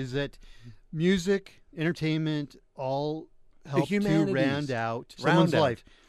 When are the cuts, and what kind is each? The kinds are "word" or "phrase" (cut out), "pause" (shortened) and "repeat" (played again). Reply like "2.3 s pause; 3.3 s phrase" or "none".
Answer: 2.7 s word; 5.2 s word

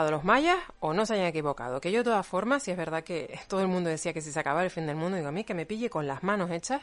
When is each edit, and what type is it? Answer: none

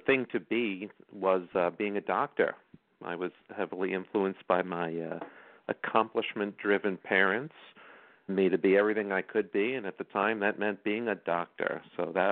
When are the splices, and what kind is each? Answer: 8.3 s phrase

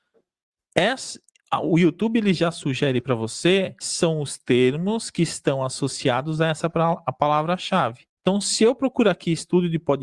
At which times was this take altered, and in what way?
3.8 s word; 8.2 s pause

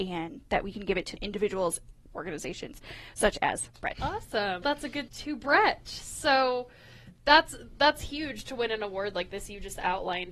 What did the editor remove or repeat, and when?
1.2 s word; 2.1 s word; 3.9 s word; 4.6 s word; 5.1 s word

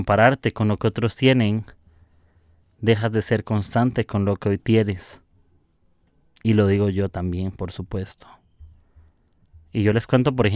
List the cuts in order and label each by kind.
4.6 s word

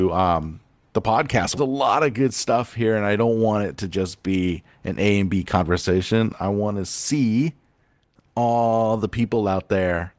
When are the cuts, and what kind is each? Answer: 1.6 s phrase

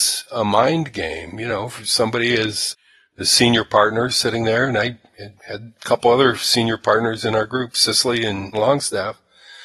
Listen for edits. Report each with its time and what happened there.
5.4 s pause; 8.5 s phrase

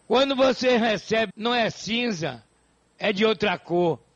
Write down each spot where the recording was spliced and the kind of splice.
1.3 s phrase

